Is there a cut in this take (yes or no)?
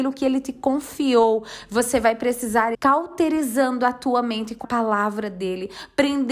yes